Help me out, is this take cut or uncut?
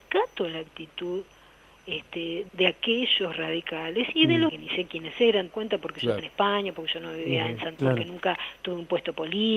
cut